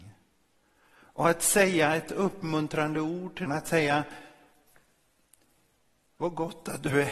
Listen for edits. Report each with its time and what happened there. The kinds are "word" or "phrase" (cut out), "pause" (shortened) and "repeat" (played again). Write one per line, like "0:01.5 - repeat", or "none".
0:03.5 - word